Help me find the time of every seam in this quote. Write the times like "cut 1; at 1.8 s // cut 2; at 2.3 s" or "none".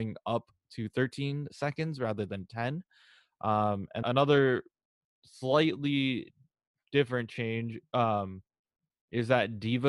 cut 1; at 4.0 s